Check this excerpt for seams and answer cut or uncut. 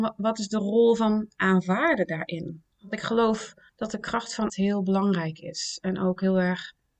cut